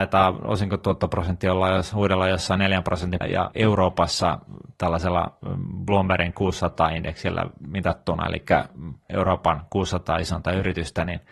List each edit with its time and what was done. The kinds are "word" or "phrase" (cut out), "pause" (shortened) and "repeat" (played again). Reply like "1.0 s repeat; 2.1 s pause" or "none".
3.2 s phrase; 3.5 s word